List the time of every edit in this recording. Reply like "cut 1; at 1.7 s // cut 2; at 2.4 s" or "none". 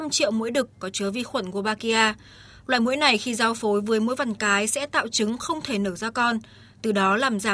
none